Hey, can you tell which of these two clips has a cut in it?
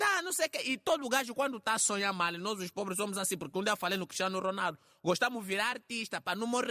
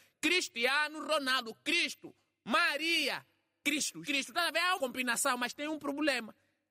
second; 2 cuts; at 4.0 s, 4.8 s

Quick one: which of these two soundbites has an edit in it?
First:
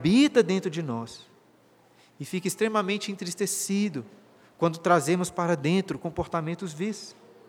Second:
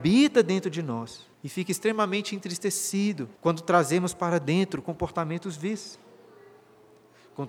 second; 2 cuts; at 1.3 s, 3.4 s

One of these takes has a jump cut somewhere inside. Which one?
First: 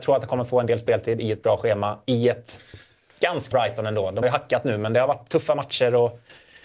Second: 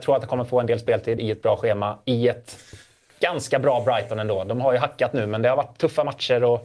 first; 2 cuts; at 3.5 s, 4.2 s

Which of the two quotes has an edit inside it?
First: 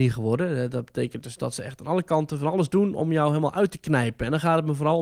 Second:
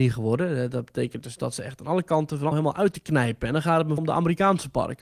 second; 2 cuts; at 2.5 s, 4.0 s

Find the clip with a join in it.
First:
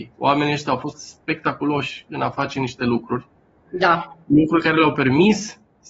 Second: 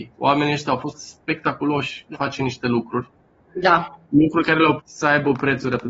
second; 2 cuts; at 2.1 s, 4.8 s

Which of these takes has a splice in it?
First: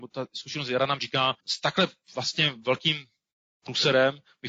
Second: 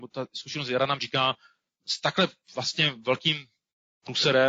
first; 1 cut; at 1.4 s

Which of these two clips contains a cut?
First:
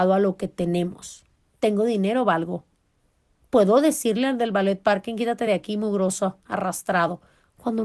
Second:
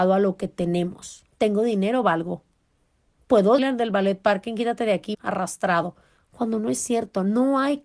second; 3 cuts; at 1.3 s, 3.6 s, 5.1 s

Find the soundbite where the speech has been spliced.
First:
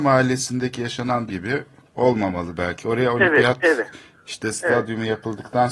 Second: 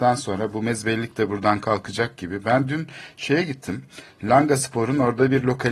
first; 1 cut; at 1.3 s

